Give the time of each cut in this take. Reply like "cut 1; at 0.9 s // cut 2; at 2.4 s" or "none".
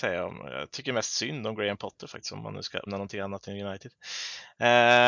cut 1; at 2.9 s